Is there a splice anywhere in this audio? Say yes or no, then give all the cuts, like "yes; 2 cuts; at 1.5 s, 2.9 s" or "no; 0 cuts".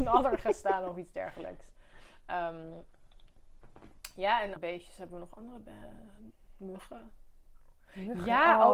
yes; 1 cut; at 4.6 s